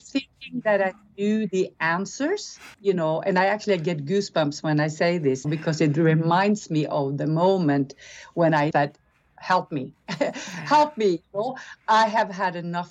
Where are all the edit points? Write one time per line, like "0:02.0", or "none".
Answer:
0:02.7
0:05.4
0:08.7

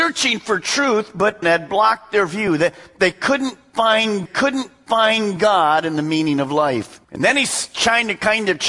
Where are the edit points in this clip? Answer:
0:01.4
0:04.3
0:07.0

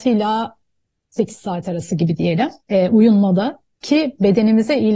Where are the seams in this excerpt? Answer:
0:02.6
0:03.7

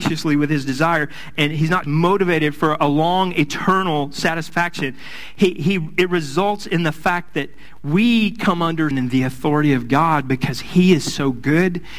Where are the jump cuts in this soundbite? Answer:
0:01.8
0:08.9

